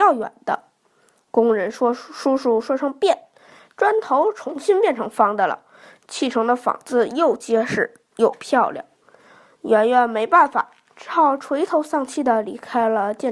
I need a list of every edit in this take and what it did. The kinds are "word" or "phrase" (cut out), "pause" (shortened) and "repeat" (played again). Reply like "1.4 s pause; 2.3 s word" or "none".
none